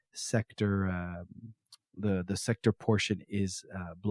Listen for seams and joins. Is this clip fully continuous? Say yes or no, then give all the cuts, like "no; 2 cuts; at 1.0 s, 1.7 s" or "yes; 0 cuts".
yes; 0 cuts